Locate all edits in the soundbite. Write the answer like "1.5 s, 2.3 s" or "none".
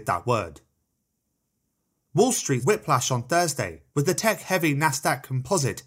1.2 s, 2.6 s, 3.9 s